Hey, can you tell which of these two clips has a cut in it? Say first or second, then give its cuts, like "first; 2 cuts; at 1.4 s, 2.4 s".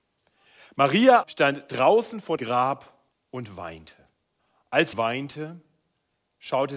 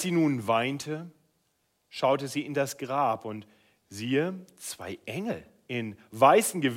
first; 5 cuts; at 1.2 s, 2.4 s, 3.1 s, 4.4 s, 4.9 s